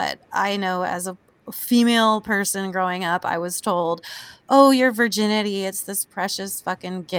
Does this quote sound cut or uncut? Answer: uncut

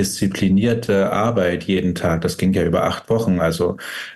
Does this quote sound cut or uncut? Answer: uncut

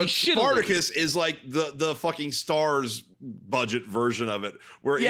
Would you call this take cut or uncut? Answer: cut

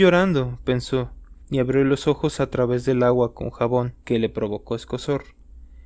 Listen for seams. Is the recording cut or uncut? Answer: cut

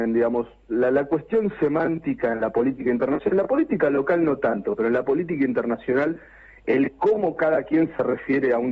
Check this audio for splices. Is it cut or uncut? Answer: uncut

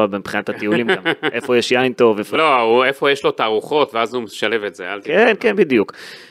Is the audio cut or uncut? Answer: cut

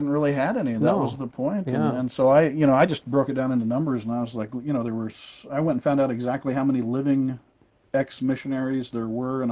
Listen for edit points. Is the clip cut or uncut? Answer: uncut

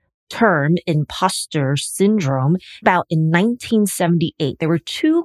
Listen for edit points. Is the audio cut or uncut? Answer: cut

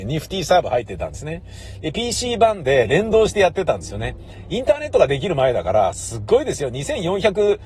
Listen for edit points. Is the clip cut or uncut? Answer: uncut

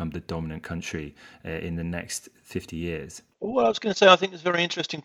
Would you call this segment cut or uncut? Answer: cut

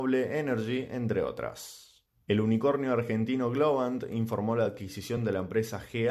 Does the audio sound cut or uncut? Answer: uncut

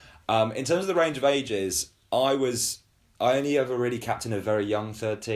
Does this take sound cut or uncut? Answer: uncut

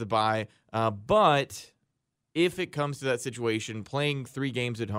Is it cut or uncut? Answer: uncut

